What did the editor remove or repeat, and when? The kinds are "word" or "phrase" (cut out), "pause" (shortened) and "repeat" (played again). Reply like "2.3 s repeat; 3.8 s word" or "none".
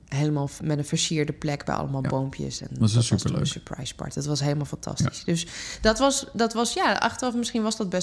none